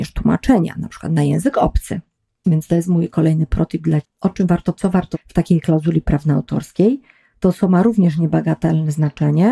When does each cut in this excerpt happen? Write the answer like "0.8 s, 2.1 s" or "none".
4.0 s, 4.7 s, 5.1 s